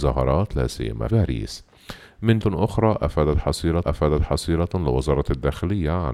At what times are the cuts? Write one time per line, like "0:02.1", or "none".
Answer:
0:01.1
0:02.4
0:03.8